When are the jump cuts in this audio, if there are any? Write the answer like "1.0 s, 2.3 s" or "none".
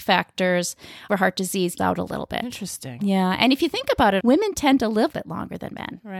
1.1 s, 1.8 s, 4.2 s, 5.1 s